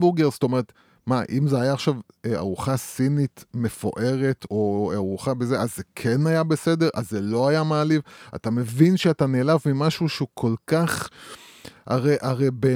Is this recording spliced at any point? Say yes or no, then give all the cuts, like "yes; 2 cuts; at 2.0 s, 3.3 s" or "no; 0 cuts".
yes; 1 cut; at 4.5 s